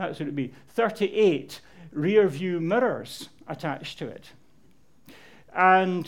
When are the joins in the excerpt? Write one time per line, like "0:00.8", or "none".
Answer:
none